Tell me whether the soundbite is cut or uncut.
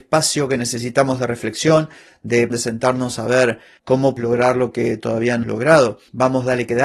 cut